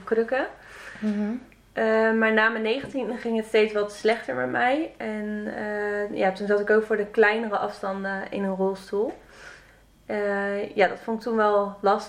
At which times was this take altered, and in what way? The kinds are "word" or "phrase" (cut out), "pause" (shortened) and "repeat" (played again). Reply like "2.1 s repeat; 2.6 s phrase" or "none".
none